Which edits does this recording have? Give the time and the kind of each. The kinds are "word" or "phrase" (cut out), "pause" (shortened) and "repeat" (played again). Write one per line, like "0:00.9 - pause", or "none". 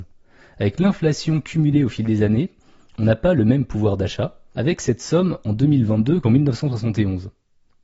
none